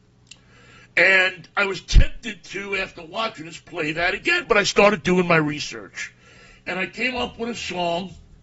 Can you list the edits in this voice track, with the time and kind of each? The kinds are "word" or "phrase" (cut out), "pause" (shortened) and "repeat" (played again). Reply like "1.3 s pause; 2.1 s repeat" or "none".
none